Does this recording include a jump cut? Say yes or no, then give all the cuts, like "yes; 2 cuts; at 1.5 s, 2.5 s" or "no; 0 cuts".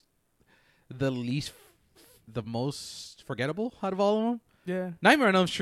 no; 0 cuts